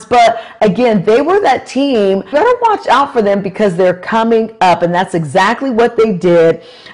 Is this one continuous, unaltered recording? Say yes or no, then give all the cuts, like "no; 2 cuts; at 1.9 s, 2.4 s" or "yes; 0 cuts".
no; 1 cut; at 2.3 s